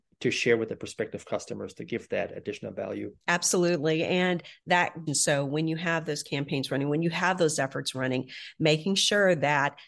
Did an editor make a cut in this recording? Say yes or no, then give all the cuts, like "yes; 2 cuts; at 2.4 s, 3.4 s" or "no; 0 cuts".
yes; 2 cuts; at 3.2 s, 5.1 s